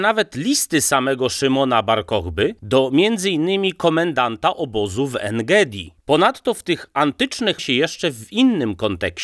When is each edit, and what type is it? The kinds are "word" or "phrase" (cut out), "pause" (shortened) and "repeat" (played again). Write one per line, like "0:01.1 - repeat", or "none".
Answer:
0:06.0 - pause
0:07.6 - phrase